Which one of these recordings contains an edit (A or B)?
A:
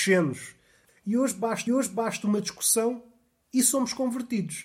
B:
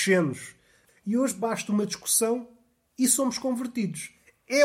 A